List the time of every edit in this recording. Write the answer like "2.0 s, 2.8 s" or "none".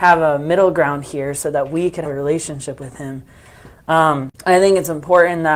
2.1 s, 4.3 s